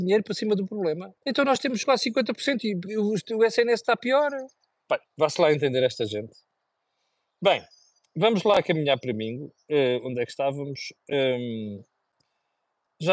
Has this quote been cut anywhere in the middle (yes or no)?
yes